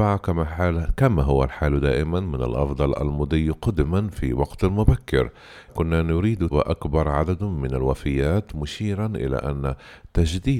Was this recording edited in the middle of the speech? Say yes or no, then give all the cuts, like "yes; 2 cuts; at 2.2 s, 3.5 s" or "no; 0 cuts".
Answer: yes; 2 cuts; at 5.7 s, 6.5 s